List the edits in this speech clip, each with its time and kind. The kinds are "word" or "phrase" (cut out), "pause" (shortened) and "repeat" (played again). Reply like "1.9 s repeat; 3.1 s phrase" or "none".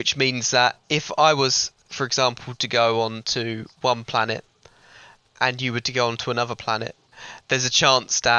none